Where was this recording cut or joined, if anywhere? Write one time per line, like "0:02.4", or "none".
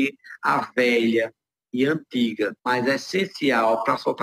0:02.6